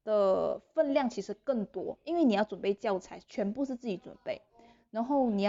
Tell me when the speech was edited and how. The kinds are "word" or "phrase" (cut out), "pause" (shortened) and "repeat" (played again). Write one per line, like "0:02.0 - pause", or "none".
none

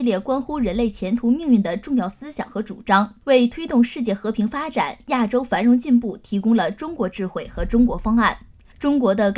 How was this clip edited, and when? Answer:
none

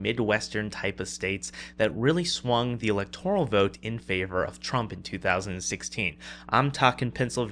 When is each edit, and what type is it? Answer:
none

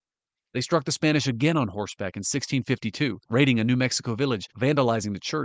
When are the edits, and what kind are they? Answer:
0:03.2 - pause
0:04.5 - pause

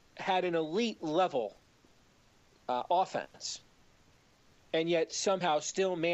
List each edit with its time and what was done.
none

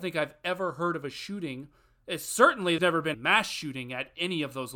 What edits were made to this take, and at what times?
0:02.8 - word
0:03.1 - word

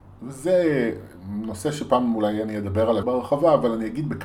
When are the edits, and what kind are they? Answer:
0:03.0 - word

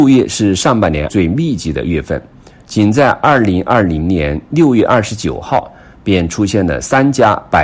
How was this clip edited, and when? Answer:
0:01.1 - word

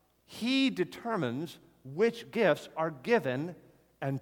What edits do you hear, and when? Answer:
none

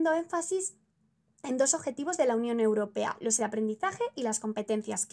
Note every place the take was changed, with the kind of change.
0:03.4 - word

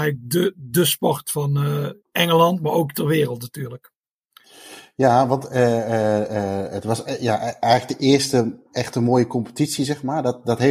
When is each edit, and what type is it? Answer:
0:02.0 - pause

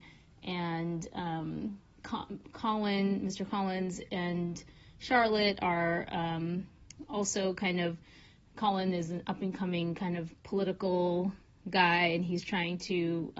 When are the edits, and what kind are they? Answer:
none

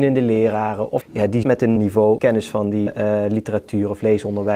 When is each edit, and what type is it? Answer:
0:01.0 - word
0:01.4 - word
0:01.8 - word
0:02.2 - word
0:02.9 - word

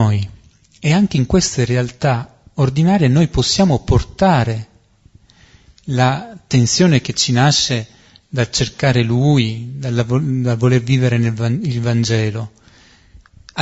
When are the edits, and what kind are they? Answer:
none

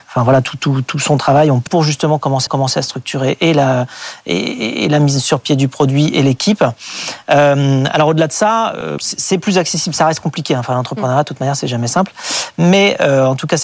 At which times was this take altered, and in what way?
0:01.7 - phrase
0:02.5 - repeat
0:09.0 - word

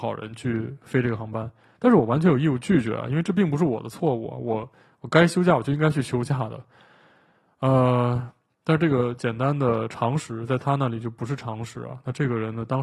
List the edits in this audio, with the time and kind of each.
none

